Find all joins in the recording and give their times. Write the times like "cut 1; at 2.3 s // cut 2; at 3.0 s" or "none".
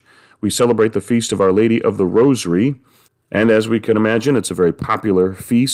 cut 1; at 3.1 s